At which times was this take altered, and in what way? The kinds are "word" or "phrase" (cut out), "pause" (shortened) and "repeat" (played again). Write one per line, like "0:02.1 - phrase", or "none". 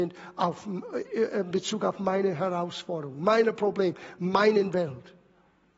none